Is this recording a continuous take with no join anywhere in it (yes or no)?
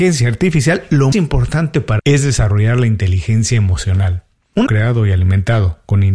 no